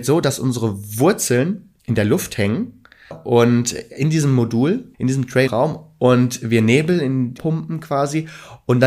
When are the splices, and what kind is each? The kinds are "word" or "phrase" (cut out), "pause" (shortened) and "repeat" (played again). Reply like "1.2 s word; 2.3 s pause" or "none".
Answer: 1.8 s pause; 3.1 s word; 4.9 s pause; 5.5 s phrase; 7.4 s phrase